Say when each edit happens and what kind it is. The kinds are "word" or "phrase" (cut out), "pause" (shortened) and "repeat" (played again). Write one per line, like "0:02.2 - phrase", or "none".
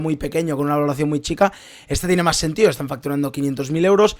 none